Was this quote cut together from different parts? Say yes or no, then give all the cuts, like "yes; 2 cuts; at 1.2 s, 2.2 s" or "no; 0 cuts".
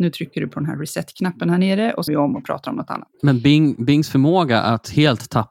yes; 2 cuts; at 2.1 s, 3.1 s